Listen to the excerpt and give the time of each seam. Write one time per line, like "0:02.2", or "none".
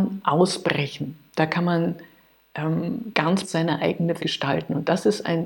0:03.4
0:04.2